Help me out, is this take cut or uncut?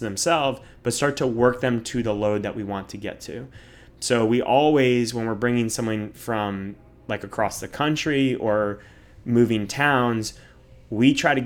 uncut